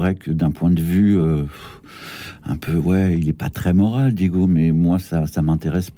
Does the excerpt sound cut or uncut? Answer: uncut